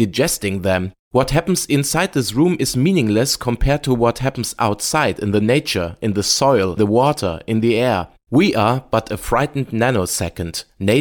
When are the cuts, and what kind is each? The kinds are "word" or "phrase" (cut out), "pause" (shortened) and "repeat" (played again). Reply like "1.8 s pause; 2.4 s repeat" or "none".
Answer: 6.8 s word